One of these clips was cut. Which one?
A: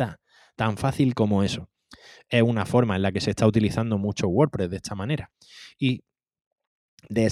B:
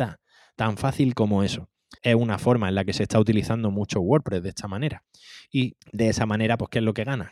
B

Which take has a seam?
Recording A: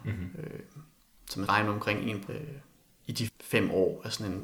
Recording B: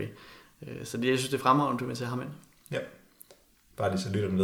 A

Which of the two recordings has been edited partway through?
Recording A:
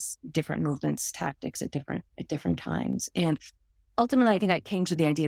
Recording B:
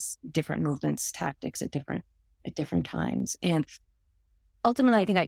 A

